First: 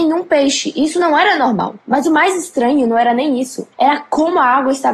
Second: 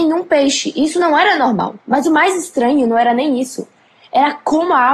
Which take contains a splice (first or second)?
first